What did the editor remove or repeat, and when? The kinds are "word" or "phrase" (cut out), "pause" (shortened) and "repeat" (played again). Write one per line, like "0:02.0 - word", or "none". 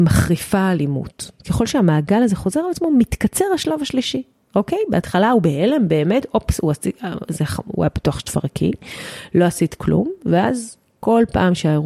none